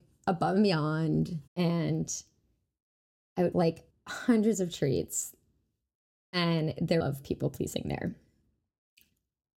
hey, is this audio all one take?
no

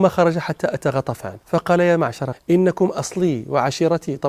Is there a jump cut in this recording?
yes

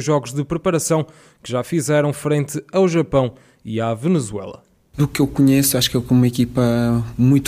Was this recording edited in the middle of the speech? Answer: no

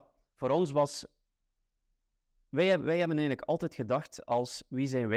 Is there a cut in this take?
no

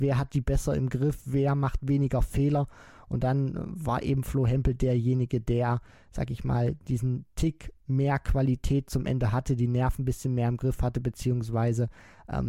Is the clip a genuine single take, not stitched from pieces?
yes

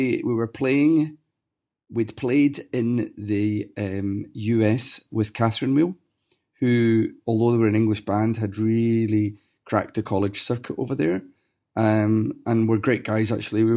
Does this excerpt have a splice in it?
no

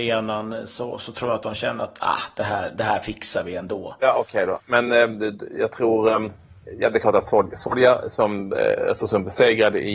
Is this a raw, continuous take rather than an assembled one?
yes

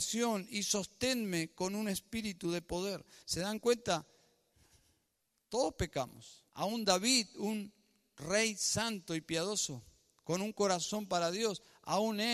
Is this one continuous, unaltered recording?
no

